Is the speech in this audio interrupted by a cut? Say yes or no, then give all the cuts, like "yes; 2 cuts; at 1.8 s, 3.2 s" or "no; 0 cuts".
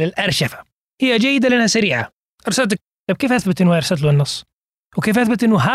yes; 1 cut; at 2.8 s